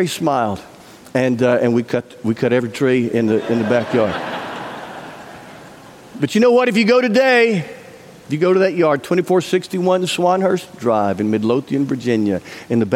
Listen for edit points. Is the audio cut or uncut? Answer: uncut